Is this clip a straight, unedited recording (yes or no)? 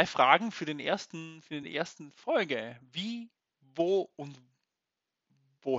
yes